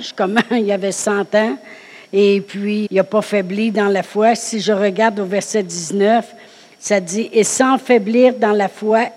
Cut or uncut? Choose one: cut